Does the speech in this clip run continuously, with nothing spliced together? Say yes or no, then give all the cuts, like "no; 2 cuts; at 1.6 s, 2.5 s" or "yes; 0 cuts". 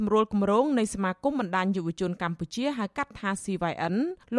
yes; 0 cuts